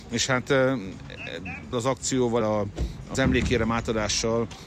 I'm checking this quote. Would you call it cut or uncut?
cut